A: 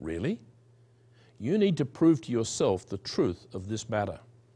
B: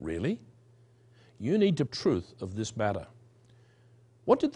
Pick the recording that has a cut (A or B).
B